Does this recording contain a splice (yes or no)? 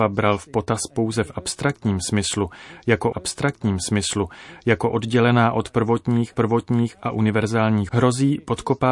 yes